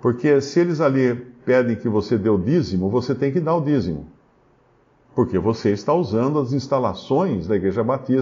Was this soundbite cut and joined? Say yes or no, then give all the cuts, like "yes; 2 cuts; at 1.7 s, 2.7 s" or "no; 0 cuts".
no; 0 cuts